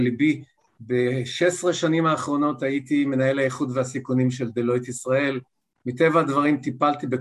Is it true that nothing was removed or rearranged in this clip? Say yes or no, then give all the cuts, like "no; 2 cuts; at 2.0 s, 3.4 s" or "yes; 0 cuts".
yes; 0 cuts